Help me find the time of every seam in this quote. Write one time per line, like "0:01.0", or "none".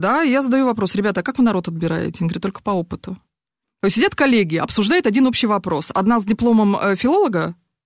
none